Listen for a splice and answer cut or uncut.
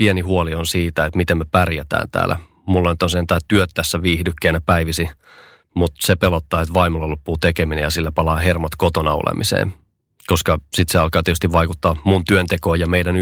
uncut